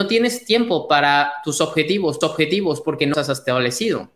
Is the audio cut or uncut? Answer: cut